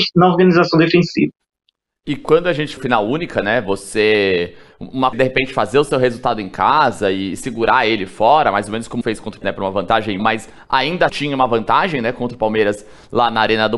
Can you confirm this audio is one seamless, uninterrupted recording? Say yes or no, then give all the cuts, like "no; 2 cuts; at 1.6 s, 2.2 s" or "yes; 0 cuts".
no; 6 cuts; at 2.8 s, 5.1 s, 9.0 s, 9.4 s, 10.2 s, 11.1 s